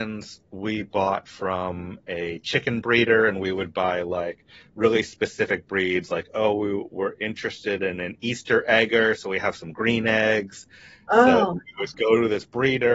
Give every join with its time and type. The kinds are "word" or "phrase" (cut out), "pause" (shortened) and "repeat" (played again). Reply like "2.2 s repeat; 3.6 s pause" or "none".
none

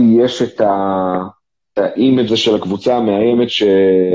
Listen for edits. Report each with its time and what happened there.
1.7 s word; 2.3 s word

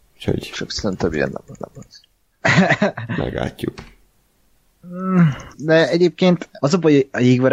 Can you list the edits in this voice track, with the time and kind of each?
1.6 s repeat; 5.5 s pause; 6.6 s word

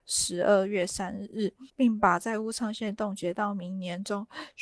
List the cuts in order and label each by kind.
1.7 s pause

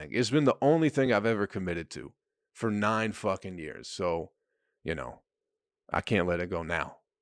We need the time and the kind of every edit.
none

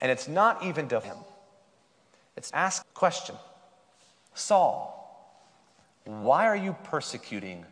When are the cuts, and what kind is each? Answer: 1.0 s word; 2.5 s word; 2.8 s word; 4.3 s word

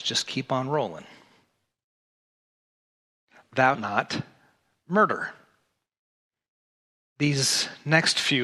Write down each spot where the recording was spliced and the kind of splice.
3.7 s word

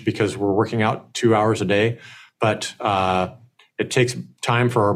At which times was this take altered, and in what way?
none

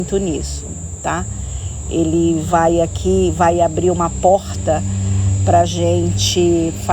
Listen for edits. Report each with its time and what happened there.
none

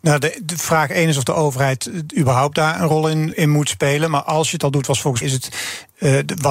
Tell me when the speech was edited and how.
3.3 s word; 5.2 s word

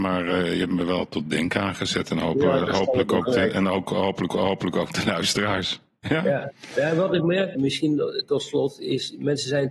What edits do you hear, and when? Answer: 4.3 s repeat; 7.5 s word

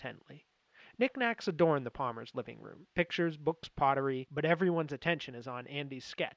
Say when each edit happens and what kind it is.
none

